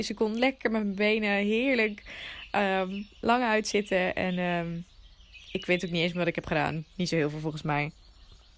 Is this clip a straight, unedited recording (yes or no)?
yes